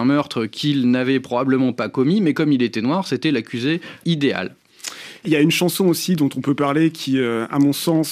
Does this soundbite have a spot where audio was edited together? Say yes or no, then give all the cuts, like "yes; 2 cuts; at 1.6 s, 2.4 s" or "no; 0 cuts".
no; 0 cuts